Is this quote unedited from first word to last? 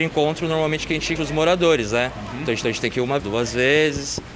no; 3 cuts; at 1.2 s, 2.6 s, 3.2 s

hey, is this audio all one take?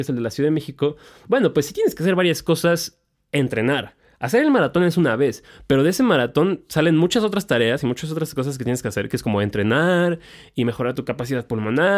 yes; 0 cuts

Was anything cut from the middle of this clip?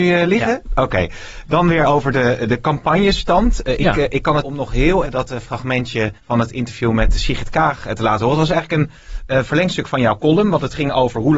yes; 4 cuts; at 4.4 s, 5.0 s, 6.2 s, 9.3 s

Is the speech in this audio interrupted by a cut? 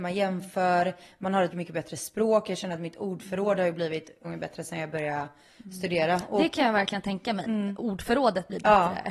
yes; 3 cuts; at 1.5 s, 4.2 s, 7.4 s

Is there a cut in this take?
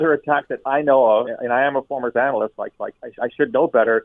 yes; 3 cuts; at 1.2 s, 2.1 s, 2.8 s

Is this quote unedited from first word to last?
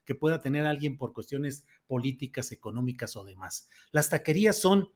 yes; 0 cuts

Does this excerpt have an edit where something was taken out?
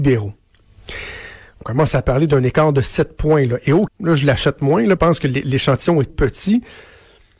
yes; 4 cuts; at 1.6 s, 3.9 s, 5.0 s, 6.1 s

